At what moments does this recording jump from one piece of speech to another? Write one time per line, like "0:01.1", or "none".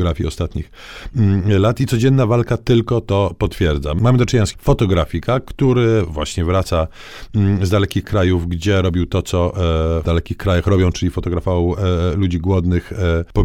0:04.5
0:10.0